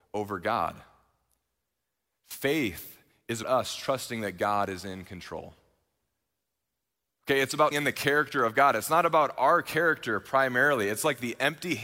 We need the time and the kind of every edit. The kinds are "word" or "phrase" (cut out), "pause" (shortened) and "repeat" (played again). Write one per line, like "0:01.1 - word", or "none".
0:03.4 - word
0:07.7 - word